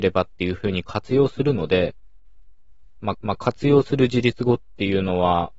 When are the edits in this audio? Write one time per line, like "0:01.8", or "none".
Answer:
0:03.1